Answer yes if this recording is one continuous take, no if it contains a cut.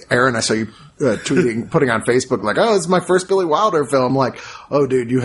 no